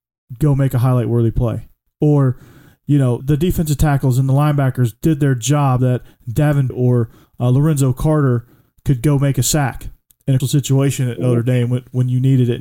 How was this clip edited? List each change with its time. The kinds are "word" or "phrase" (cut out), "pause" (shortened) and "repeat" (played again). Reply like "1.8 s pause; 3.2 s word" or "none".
3.2 s word; 5.8 s word; 6.7 s word; 10.4 s word